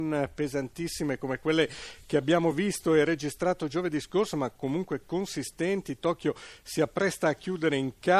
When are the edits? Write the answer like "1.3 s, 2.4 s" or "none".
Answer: none